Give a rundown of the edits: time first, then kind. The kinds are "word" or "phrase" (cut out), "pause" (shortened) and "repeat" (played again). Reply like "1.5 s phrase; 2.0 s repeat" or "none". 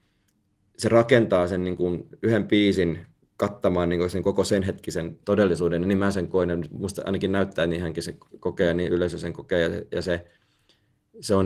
3.2 s pause; 5.2 s pause

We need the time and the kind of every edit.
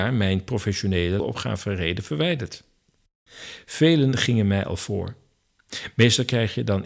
1.2 s phrase

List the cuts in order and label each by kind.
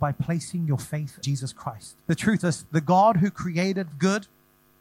1.2 s word; 2.0 s pause; 2.4 s word; 3.9 s phrase

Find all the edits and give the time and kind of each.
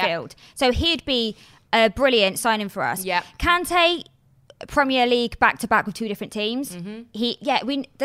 none

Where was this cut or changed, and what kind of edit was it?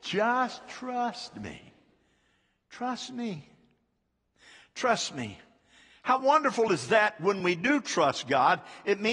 none

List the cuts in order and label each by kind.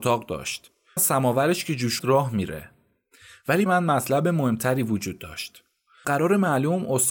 1.0 s word; 2.0 s word; 3.7 s word; 6.0 s word

